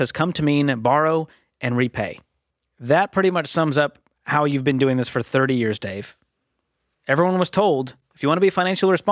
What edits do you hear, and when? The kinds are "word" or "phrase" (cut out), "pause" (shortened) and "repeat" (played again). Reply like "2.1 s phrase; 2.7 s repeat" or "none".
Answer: none